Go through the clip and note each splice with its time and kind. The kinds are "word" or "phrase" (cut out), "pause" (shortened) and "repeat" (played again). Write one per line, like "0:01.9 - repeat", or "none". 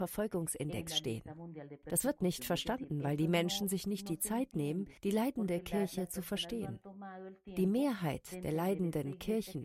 0:05.0 - pause